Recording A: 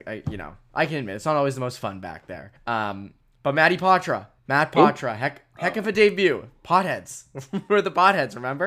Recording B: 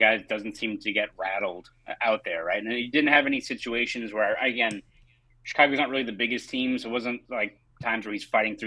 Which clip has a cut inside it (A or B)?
A